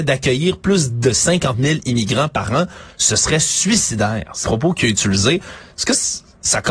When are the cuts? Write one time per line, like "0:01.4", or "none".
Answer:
0:04.4